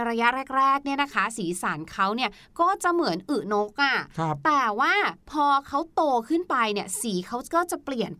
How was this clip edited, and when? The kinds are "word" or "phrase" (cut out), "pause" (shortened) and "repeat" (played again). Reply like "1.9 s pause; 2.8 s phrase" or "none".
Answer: none